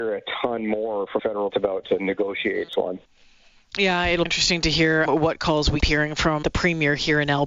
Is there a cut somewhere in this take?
yes; 8 cuts; at 1.2 s, 1.5 s, 1.8 s, 2.7 s, 4.3 s, 5.1 s, 5.8 s, 6.4 s

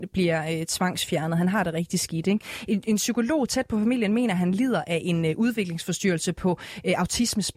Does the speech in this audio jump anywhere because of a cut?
no; 0 cuts

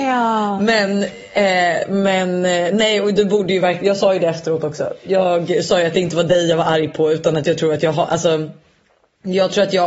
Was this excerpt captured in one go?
yes; 0 cuts

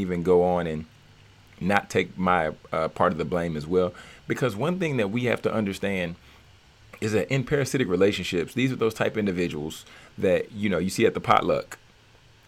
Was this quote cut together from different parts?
no; 0 cuts

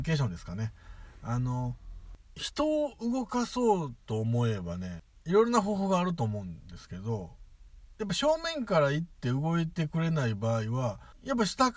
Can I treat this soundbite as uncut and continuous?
no; 1 cut; at 4.0 s

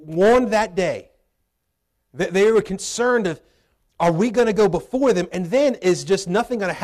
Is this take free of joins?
yes; 0 cuts

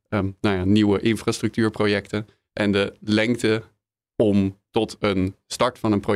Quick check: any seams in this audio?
no; 0 cuts

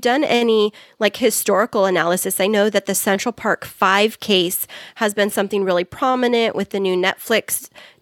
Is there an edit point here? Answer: no; 0 cuts

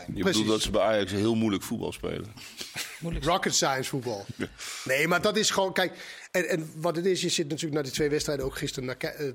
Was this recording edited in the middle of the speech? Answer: no; 0 cuts

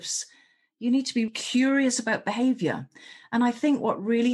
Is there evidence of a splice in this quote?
yes; 1 cut; at 1.3 s

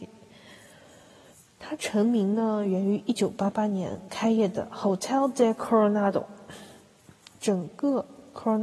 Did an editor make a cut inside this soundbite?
no; 0 cuts

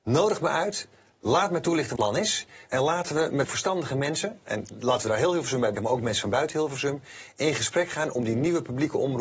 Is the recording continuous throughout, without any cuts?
no; 3 cuts; at 2.0 s, 3.4 s, 5.7 s

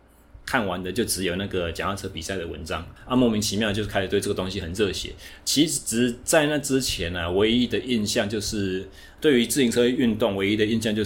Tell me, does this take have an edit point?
yes; 1 cut; at 3.0 s

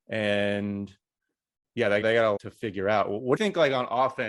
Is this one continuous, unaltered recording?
no; 3 cuts; at 2.0 s, 2.4 s, 3.4 s

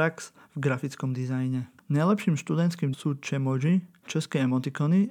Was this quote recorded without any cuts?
no; 2 cuts; at 2.9 s, 4.1 s

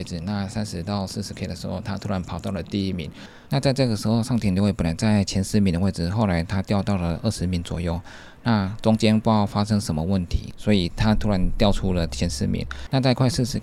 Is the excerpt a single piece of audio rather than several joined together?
no; 1 cut; at 3.5 s

